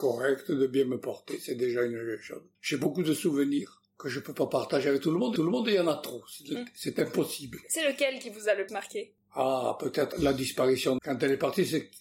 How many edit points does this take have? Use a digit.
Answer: 6